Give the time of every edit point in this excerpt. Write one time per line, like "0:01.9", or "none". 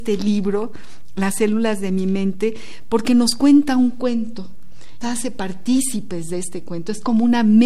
0:05.0